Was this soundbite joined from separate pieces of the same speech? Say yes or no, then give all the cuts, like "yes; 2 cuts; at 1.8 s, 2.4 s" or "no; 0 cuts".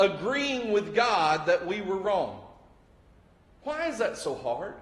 no; 0 cuts